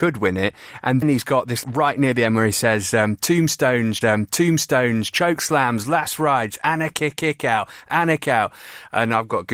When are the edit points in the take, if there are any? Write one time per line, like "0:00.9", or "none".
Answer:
0:01.0
0:01.6
0:04.0
0:07.2
0:08.2